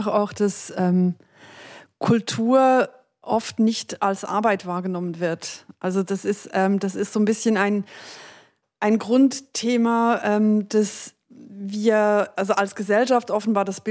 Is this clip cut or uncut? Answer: uncut